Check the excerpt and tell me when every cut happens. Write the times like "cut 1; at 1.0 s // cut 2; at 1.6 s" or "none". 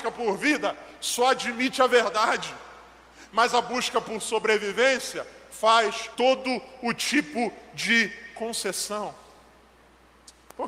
cut 1; at 6.1 s